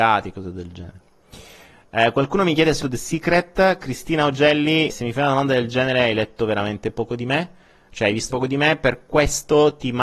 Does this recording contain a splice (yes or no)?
yes